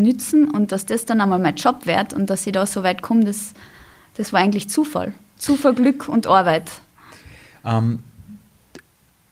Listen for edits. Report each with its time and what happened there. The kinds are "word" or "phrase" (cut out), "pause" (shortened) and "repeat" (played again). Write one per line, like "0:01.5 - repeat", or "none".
none